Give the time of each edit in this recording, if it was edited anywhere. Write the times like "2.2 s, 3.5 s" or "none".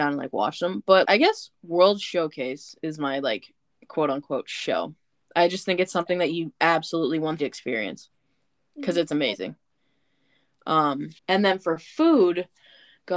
1.0 s, 7.4 s, 11.2 s